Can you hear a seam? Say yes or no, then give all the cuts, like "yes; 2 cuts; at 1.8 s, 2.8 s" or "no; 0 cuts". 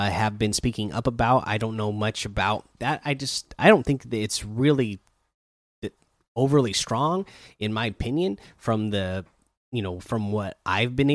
yes; 1 cut; at 3.6 s